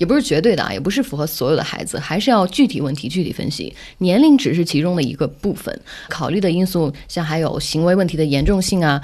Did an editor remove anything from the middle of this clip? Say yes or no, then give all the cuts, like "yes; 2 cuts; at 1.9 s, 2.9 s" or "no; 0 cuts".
yes; 1 cut; at 6.1 s